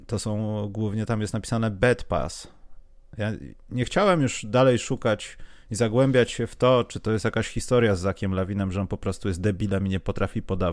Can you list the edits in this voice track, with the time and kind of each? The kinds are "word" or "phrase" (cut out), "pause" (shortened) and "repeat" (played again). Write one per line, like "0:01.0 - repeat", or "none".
none